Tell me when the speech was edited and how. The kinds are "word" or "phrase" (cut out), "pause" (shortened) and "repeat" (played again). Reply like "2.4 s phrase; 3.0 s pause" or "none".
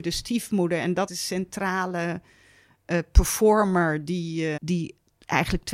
1.1 s phrase; 4.6 s word